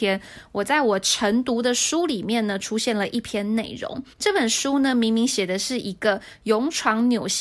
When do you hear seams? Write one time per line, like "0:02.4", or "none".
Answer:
0:04.1